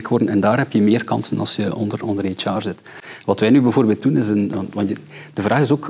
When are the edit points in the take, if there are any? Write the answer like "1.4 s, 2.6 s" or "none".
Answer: none